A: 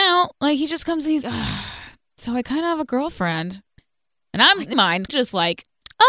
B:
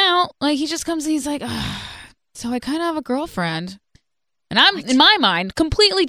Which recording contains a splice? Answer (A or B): A